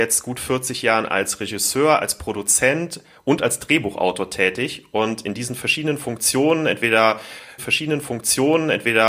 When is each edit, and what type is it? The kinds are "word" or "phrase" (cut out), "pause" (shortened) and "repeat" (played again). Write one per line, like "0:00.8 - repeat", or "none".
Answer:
0:07.6 - repeat